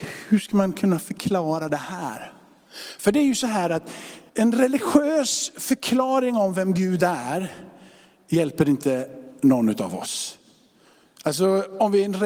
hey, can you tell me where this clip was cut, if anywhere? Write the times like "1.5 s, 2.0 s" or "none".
4.3 s